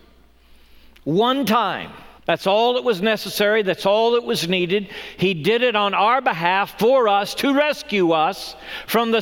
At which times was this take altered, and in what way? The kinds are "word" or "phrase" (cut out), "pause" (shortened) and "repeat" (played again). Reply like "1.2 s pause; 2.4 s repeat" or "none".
2.2 s pause

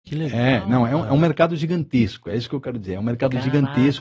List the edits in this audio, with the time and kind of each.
none

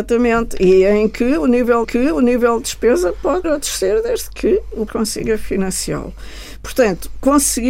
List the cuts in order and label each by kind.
1.8 s repeat; 3.4 s word; 4.9 s word

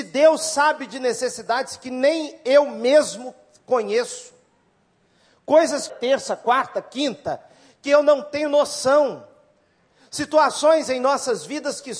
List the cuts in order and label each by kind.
5.9 s phrase

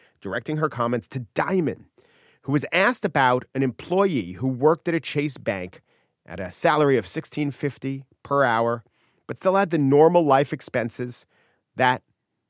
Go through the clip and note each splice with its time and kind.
none

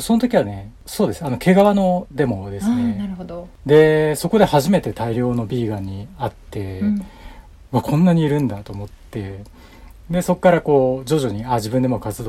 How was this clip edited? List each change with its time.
none

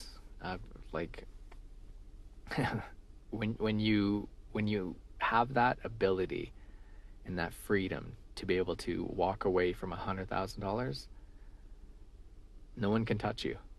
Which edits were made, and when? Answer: none

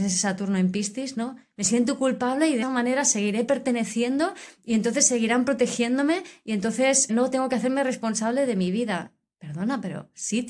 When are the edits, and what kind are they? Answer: 2.6 s word; 7.1 s word

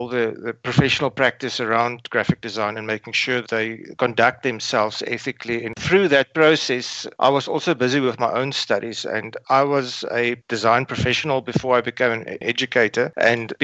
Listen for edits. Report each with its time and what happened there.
3.4 s word

